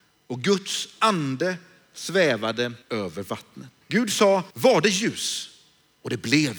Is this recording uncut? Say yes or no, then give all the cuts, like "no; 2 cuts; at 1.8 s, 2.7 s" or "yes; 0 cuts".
no; 3 cuts; at 2.8 s, 3.8 s, 4.5 s